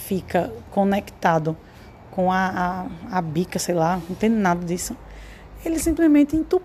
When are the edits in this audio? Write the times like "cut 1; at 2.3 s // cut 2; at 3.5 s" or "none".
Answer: none